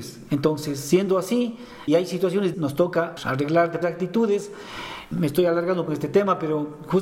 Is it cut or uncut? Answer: cut